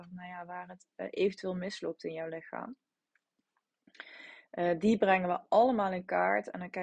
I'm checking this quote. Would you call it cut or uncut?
uncut